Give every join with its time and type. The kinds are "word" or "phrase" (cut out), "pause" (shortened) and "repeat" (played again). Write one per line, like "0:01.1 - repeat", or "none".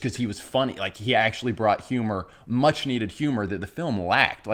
none